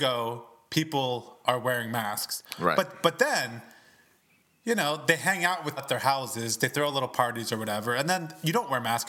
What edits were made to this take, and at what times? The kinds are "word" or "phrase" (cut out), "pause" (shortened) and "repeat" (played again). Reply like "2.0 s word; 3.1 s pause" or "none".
5.8 s word